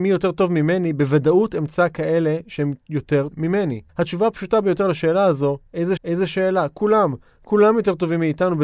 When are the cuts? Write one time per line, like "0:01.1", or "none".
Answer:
0:03.3
0:03.9
0:06.0